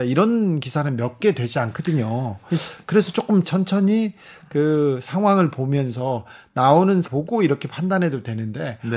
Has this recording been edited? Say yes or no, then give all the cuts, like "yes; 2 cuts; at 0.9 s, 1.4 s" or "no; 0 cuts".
yes; 3 cuts; at 2.8 s, 3.4 s, 7.0 s